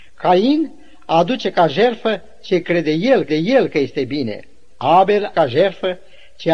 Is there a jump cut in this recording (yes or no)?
yes